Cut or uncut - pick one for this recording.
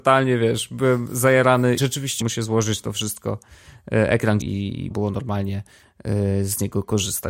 cut